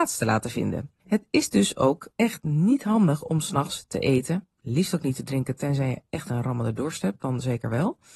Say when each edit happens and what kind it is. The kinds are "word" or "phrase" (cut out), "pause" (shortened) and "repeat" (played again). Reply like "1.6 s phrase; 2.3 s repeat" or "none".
1.0 s pause; 2.1 s pause; 4.5 s pause